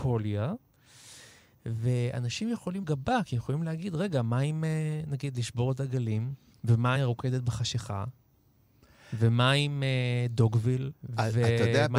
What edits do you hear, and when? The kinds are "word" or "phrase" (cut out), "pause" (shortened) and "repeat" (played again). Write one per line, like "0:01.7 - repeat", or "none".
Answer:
0:02.8 - word
0:07.0 - word